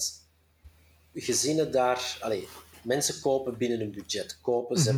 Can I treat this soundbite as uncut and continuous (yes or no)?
no